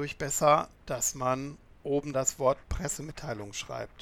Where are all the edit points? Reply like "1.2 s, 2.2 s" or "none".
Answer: 2.1 s

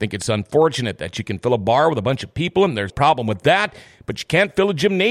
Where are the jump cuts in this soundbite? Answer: 2.9 s

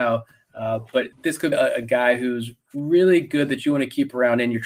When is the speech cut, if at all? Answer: 1.1 s, 1.5 s

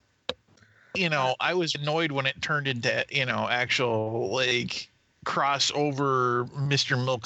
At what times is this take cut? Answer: 1.7 s

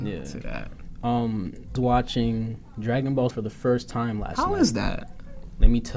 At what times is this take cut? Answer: 1.8 s, 3.3 s

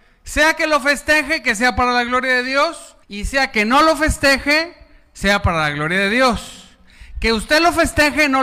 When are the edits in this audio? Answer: 3.0 s

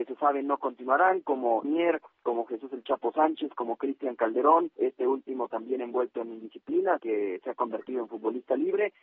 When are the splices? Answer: 1.6 s, 4.7 s, 7.0 s

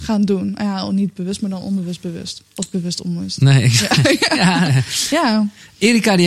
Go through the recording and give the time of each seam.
2.5 s

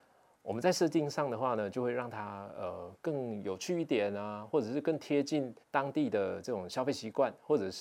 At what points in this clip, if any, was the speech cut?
5.6 s

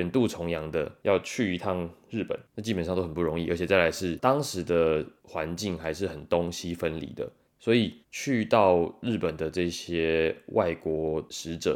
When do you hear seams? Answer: 5.2 s, 7.5 s, 8.0 s

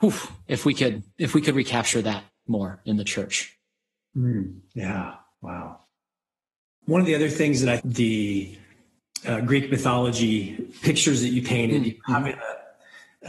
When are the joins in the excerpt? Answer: 7.8 s

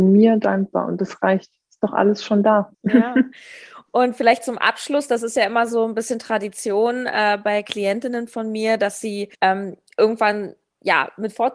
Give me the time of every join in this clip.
2.7 s, 9.3 s

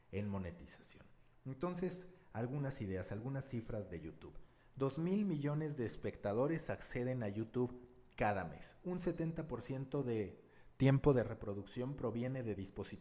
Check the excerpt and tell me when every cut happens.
none

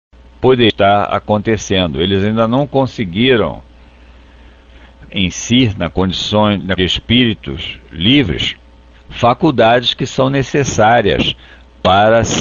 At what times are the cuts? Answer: 5.1 s, 6.8 s, 8.9 s

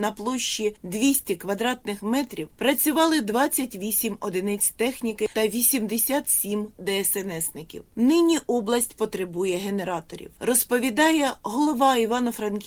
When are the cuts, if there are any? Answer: 5.3 s

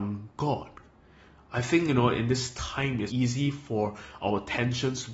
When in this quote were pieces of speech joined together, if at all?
3.1 s

